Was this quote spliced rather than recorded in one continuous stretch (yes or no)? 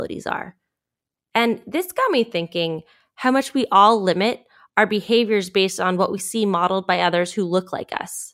no